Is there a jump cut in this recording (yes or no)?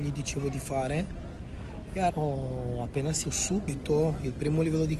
yes